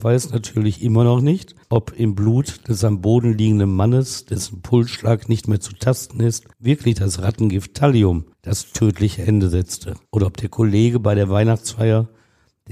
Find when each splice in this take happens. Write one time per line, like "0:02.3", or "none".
0:01.6
0:06.5
0:08.3
0:10.1